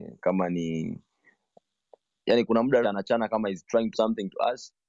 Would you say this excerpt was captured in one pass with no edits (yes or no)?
no